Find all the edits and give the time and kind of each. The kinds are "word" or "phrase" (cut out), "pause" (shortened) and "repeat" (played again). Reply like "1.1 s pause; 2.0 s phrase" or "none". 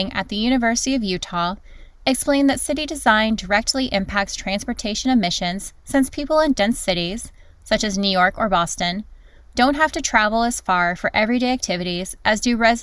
none